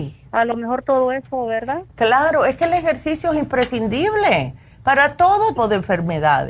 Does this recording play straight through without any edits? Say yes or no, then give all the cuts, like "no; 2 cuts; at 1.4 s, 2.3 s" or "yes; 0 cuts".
no; 1 cut; at 5.6 s